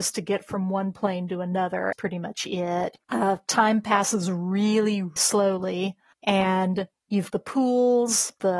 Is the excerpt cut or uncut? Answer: cut